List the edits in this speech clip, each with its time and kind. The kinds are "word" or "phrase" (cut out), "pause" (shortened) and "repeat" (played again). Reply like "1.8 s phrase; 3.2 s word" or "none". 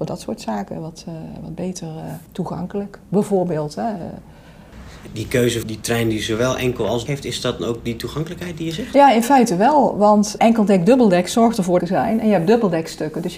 2.3 s pause; 5.1 s word; 5.6 s phrase; 7.1 s word; 7.6 s word; 10.4 s word; 11.8 s phrase